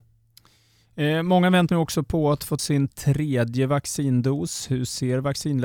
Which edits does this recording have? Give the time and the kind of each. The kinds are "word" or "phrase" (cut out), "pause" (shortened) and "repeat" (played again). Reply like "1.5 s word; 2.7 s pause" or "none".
1.7 s word; 2.6 s word